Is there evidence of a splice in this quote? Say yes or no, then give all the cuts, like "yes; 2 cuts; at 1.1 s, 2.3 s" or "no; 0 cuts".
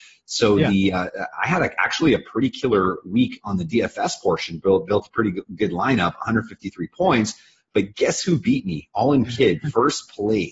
no; 0 cuts